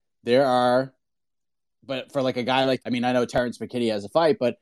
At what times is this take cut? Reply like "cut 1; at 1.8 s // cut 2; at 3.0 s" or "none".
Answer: cut 1; at 2.8 s